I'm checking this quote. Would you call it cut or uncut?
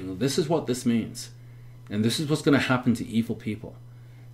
uncut